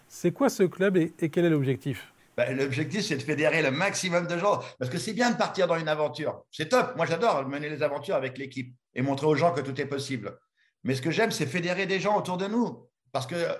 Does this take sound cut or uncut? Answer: uncut